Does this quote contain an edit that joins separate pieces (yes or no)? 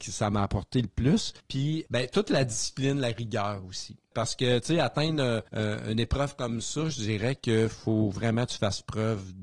yes